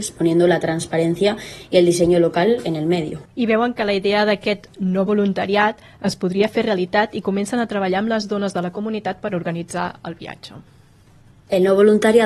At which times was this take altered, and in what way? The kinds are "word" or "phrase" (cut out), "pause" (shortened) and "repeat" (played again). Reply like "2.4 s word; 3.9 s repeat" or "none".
3.3 s pause